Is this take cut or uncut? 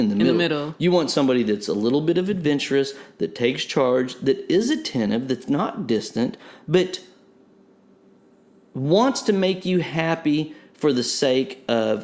uncut